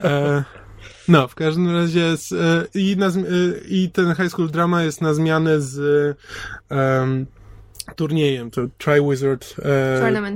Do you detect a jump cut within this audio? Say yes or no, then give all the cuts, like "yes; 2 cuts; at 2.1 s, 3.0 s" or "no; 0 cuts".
no; 0 cuts